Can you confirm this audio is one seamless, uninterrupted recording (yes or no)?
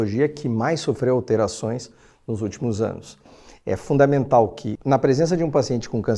yes